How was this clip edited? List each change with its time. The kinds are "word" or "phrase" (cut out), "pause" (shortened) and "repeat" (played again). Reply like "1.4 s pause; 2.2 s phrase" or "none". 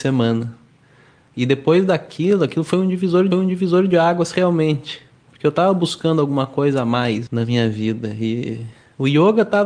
3.3 s repeat

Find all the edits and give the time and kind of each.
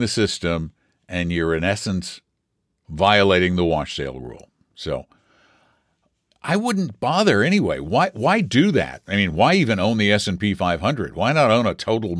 none

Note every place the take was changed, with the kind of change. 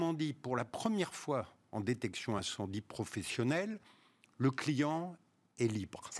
none

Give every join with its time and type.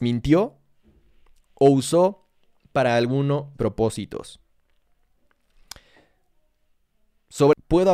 3.5 s phrase

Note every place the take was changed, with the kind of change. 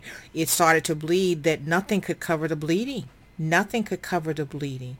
3.3 s word

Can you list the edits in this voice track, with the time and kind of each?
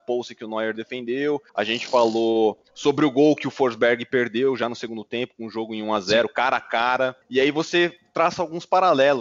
1.5 s pause; 2.7 s pause; 7.2 s pause

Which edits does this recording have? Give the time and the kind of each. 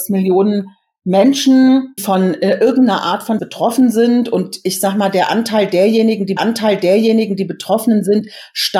2.0 s word; 3.4 s word; 6.4 s repeat

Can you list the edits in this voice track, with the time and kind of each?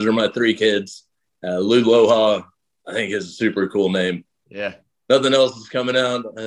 none

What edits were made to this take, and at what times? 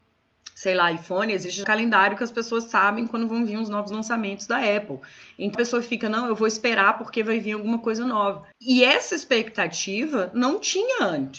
1.6 s word; 5.5 s word; 8.5 s pause

